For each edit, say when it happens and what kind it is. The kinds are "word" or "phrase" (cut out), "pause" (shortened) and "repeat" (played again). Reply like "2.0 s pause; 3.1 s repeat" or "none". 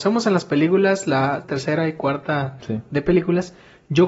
1.4 s word; 2.6 s word